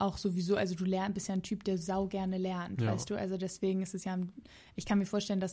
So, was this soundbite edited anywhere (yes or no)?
no